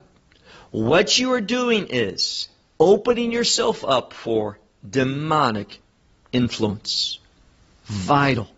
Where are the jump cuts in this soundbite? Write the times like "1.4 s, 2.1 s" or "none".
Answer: none